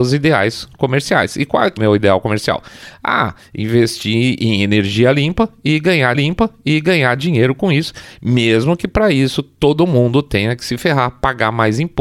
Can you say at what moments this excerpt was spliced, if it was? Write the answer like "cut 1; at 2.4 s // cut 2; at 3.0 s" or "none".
cut 1; at 1.8 s // cut 2; at 6.1 s